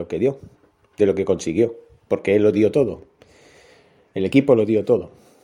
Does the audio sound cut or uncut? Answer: uncut